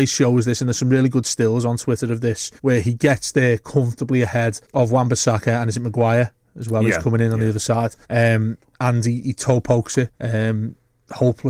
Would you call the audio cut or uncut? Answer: cut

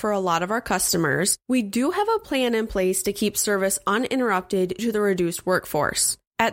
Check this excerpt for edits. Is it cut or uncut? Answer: cut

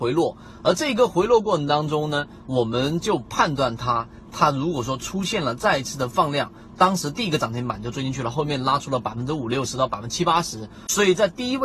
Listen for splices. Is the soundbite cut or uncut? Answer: uncut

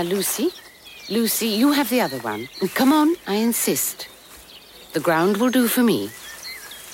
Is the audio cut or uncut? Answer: uncut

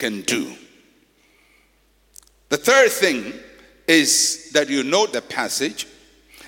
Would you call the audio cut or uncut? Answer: cut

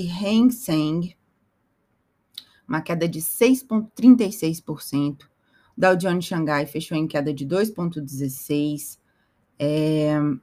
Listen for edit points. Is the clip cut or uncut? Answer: uncut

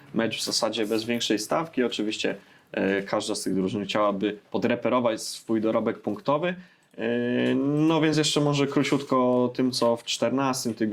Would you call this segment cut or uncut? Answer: uncut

